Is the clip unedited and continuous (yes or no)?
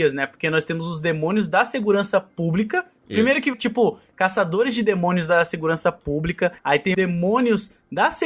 no